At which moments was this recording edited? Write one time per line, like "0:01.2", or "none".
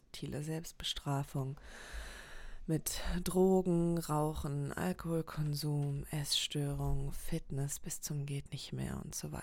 none